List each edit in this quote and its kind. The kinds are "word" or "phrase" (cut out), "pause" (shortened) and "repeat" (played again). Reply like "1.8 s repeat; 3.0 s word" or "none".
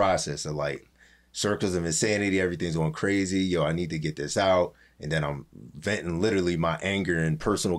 none